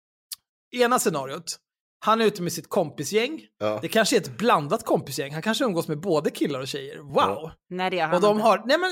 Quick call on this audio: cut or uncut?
uncut